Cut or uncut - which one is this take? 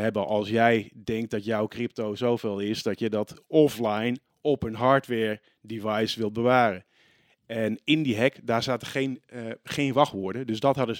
uncut